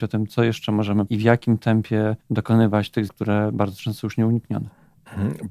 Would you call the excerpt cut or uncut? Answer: cut